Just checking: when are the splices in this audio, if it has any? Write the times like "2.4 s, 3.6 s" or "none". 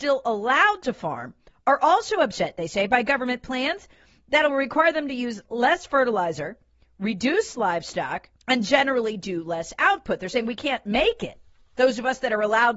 8.3 s